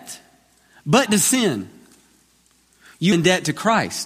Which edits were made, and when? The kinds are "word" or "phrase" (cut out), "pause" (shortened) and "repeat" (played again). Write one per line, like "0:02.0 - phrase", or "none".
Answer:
0:01.1 - word
0:03.1 - word